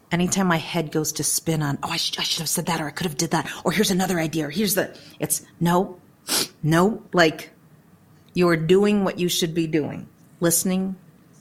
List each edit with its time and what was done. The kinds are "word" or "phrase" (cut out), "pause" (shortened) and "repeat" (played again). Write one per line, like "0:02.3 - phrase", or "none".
0:07.1 - pause
0:10.2 - pause